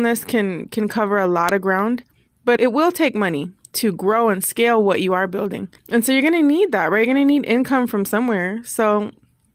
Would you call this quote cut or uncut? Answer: cut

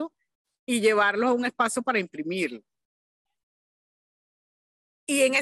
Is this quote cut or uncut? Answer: uncut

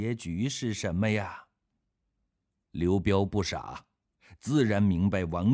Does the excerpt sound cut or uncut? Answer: cut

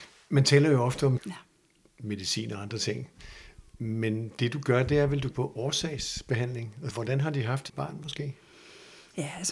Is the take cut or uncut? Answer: cut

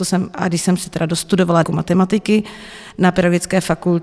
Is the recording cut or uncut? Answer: cut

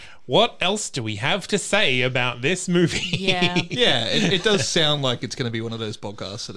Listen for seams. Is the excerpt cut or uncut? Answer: uncut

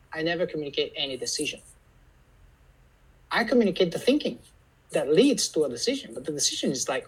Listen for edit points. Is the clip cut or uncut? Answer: uncut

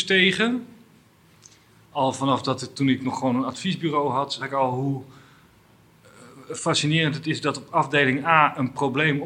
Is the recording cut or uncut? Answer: cut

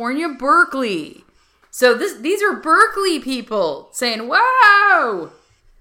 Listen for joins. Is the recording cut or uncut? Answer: uncut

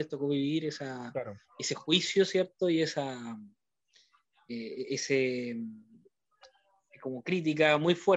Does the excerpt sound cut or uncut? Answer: uncut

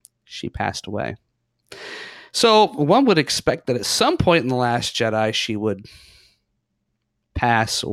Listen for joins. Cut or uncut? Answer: uncut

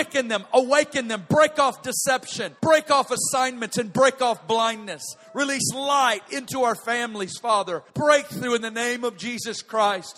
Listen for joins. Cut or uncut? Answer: cut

